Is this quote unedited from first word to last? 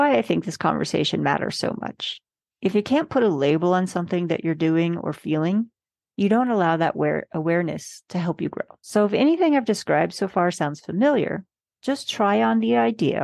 yes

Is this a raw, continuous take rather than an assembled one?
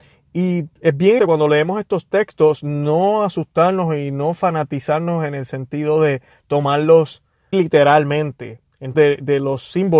no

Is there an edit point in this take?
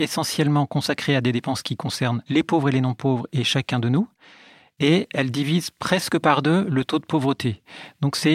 no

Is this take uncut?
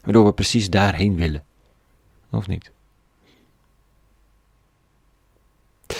yes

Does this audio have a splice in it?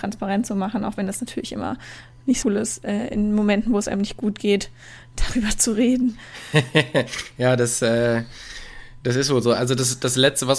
yes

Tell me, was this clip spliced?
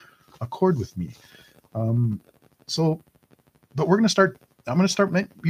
no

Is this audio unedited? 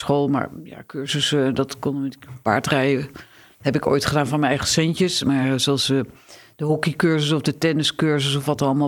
yes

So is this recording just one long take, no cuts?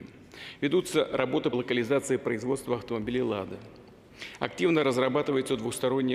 no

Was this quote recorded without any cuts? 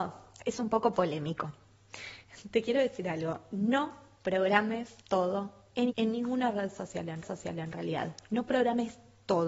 no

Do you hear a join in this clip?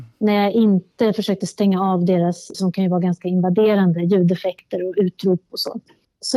yes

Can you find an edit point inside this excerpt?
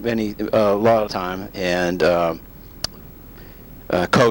yes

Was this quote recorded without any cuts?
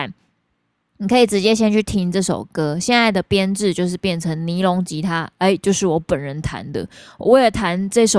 yes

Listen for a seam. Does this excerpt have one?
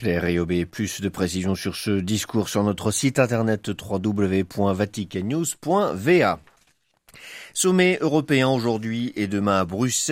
no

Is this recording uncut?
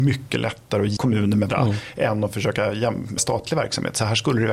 no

